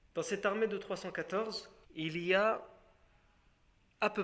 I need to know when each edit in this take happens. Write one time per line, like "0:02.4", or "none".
0:01.8